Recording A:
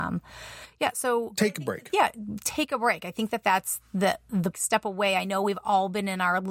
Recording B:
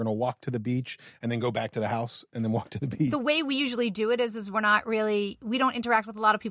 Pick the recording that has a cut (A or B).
A